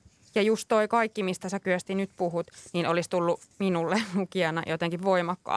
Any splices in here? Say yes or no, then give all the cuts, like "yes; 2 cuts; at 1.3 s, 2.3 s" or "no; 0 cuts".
no; 0 cuts